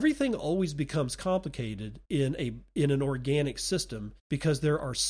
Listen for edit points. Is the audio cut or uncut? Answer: cut